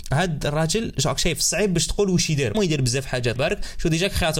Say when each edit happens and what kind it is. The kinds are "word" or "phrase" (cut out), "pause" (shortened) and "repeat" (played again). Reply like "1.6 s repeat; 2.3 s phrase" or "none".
2.5 s phrase; 3.4 s word